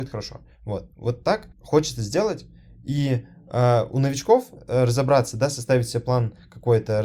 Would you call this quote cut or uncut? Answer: cut